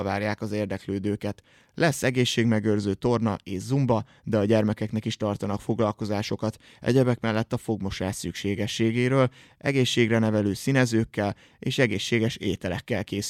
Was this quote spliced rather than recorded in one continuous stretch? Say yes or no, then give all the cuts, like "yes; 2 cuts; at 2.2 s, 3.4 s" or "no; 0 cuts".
no; 0 cuts